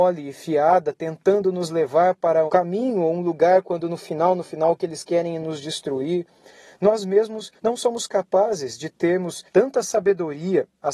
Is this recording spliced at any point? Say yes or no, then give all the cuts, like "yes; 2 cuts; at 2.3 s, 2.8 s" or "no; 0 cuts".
yes; 3 cuts; at 2.5 s, 7.6 s, 9.5 s